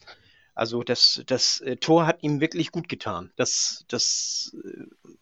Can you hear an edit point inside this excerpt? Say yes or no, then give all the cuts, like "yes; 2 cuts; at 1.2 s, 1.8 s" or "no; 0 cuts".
yes; 1 cut; at 3.3 s